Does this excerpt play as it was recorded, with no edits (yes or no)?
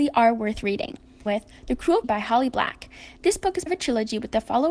no